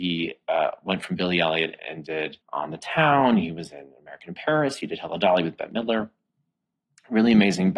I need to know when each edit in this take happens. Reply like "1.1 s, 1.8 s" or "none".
2.4 s